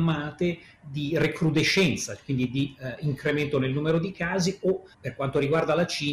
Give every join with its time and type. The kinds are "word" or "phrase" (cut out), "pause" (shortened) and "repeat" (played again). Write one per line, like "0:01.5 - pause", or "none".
0:04.9 - pause